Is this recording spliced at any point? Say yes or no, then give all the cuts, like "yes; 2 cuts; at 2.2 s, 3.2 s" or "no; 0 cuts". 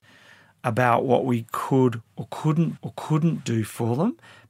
yes; 1 cut; at 2.8 s